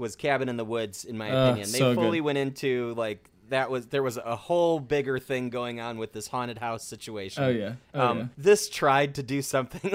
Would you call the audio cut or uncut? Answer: cut